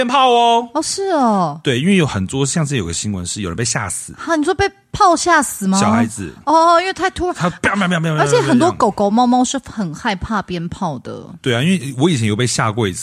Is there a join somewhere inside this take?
no; 0 cuts

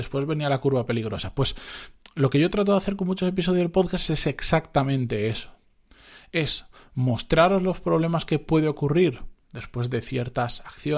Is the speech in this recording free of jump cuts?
yes; 0 cuts

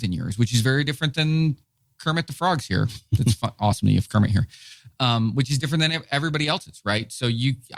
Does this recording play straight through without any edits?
yes; 0 cuts

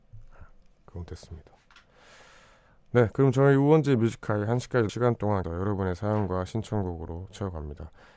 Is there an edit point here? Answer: yes; 2 cuts; at 4.9 s, 5.4 s

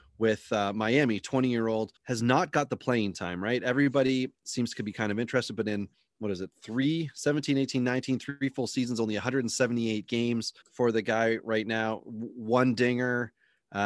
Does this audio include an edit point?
yes; 3 cuts; at 2.0 s, 5.9 s, 10.6 s

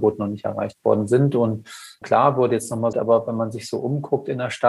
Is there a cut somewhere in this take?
yes; 2 cuts; at 2.0 s, 2.9 s

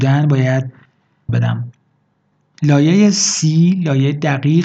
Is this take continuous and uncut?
no; 1 cut; at 1.3 s

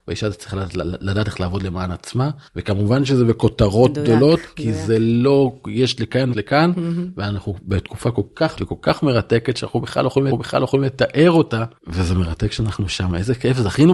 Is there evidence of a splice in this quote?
yes; 5 cuts; at 2.5 s, 6.3 s, 8.6 s, 10.3 s, 11.8 s

